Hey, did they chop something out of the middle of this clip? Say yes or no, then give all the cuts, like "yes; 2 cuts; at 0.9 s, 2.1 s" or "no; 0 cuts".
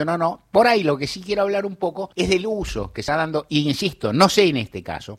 yes; 2 cuts; at 2.1 s, 3.1 s